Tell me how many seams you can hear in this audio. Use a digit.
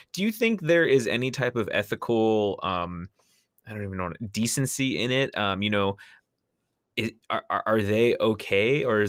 0